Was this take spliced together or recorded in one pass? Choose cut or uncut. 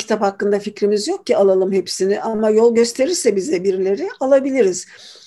uncut